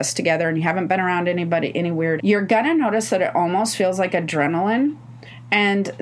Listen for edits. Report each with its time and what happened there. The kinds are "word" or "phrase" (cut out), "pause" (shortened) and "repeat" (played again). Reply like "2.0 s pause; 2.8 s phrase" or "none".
2.2 s word